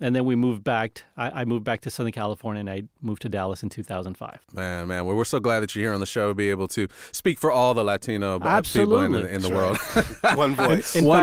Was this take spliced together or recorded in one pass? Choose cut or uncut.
uncut